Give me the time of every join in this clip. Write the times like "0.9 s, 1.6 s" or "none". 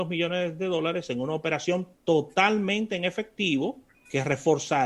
1.9 s, 3.9 s